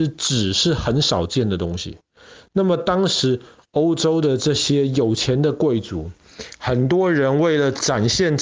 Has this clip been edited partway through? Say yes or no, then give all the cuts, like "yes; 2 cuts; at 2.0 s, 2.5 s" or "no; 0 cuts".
no; 0 cuts